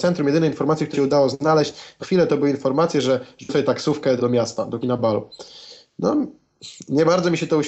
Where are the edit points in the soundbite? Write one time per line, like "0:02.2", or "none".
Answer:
0:00.9
0:02.0
0:03.5
0:04.2
0:04.8